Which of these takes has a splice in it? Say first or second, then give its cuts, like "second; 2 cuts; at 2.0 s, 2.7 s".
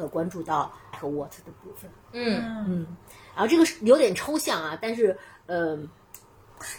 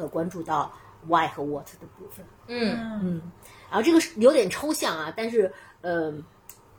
first; 1 cut; at 0.9 s